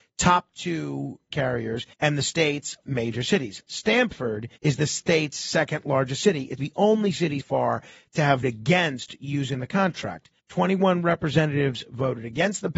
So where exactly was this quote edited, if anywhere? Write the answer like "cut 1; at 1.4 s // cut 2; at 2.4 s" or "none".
cut 1; at 1.3 s // cut 2; at 1.9 s // cut 3; at 2.8 s // cut 4; at 4.6 s // cut 5; at 6.6 s // cut 6; at 7.4 s // cut 7; at 8.4 s // cut 8; at 10.4 s